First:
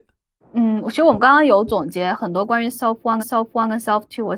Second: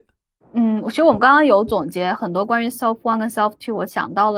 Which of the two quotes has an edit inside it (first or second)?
first